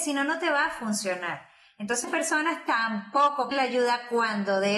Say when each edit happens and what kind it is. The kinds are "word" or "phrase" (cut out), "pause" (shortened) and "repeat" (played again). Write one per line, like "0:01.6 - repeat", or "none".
0:02.0 - word
0:03.5 - word